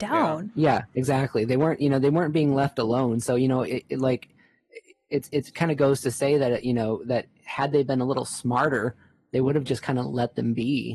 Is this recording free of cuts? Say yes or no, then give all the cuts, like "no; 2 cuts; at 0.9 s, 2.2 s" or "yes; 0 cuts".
yes; 0 cuts